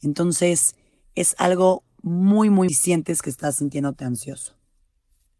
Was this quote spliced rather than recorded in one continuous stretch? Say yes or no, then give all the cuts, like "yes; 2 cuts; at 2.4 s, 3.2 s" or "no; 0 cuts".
yes; 1 cut; at 2.7 s